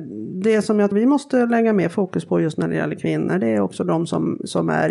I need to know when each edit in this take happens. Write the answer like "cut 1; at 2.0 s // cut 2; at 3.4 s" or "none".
cut 1; at 0.9 s

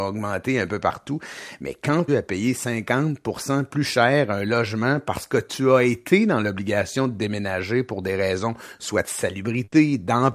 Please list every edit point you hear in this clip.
cut 1; at 2.1 s

